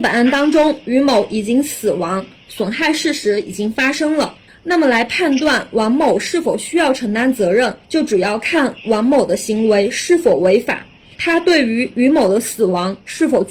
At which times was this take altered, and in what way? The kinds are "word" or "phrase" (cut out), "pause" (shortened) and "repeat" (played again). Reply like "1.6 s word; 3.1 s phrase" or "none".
4.5 s pause; 7.8 s pause

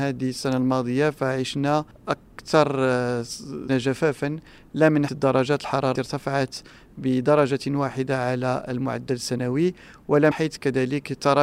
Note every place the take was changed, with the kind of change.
3.7 s word; 5.1 s word; 6.0 s word; 10.3 s word

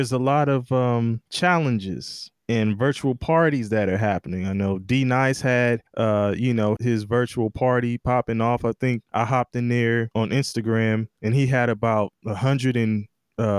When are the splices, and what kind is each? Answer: 6.8 s word

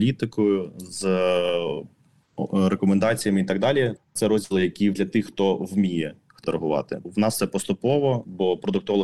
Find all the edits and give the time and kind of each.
4.0 s word; 4.9 s word; 6.4 s word; 7.0 s word

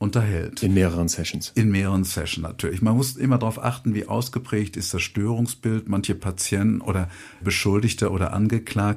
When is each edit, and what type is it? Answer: none

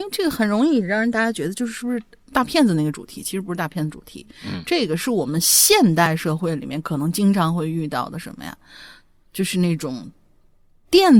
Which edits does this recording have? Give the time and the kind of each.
none

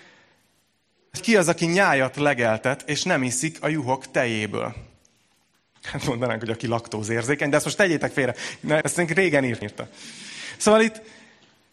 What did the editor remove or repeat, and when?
1.2 s word; 8.8 s word; 9.6 s word

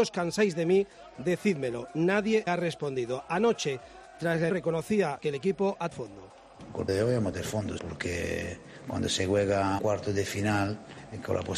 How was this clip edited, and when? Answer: 2.5 s word; 4.5 s word; 5.2 s word; 5.9 s word; 6.9 s word; 7.3 s word; 7.8 s word; 9.8 s word

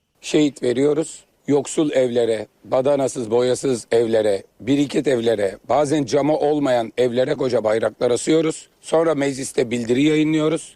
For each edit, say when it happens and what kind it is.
1.3 s pause; 2.5 s pause; 4.5 s pause; 7.4 s word; 8.7 s pause

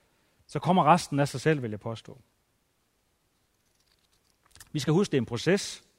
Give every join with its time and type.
none

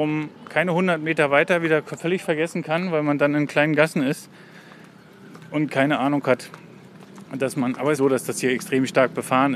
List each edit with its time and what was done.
8.0 s phrase

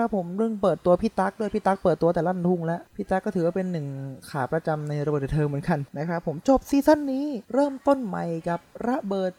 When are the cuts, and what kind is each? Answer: 2.9 s pause; 5.9 s pause; 7.4 s pause

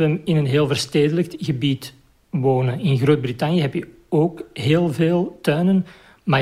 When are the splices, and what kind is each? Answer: none

